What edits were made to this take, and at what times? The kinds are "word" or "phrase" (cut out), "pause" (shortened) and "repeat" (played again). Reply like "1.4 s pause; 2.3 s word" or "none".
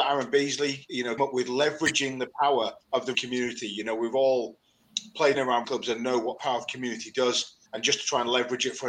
1.2 s word; 2.8 s pause; 3.1 s word; 5.3 s phrase; 5.6 s word; 6.4 s word; 7.7 s pause

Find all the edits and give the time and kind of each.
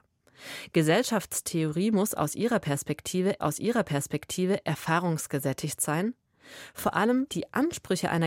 3.4 s repeat; 7.3 s phrase

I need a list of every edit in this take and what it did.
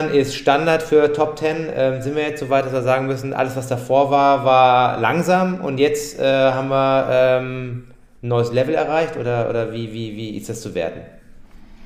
none

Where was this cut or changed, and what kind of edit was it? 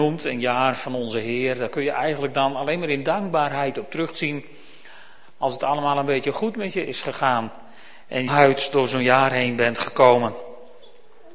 8.3 s phrase

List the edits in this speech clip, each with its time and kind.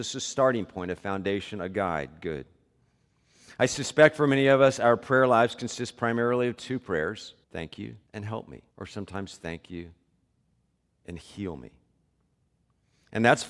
7.4 s pause; 8.1 s pause; 8.7 s pause

